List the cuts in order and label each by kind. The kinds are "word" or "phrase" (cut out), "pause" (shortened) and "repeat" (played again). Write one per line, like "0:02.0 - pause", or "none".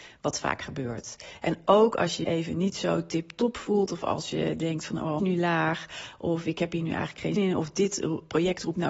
0:02.2 - word
0:05.2 - phrase
0:07.4 - word